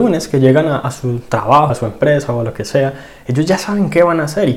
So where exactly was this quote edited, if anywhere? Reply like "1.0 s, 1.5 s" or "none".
1.7 s